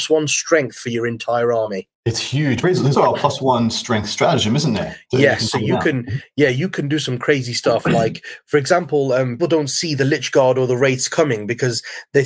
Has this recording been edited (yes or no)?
yes